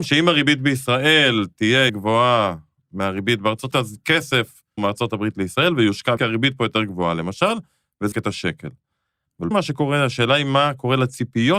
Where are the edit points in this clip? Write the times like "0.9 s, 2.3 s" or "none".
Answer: 1.9 s, 3.7 s, 4.8 s, 6.2 s, 8.1 s, 9.5 s

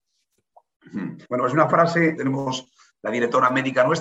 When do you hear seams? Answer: 1.2 s, 2.2 s

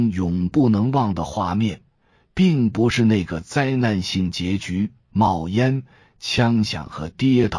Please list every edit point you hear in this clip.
none

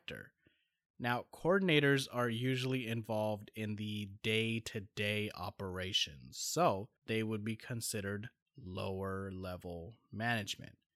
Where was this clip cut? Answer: 7.0 s

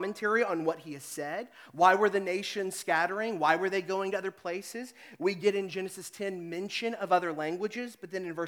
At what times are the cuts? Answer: none

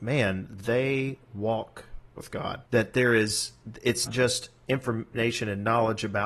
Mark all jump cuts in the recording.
2.7 s, 4.1 s

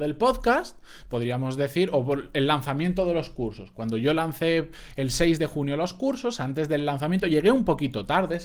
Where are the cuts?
none

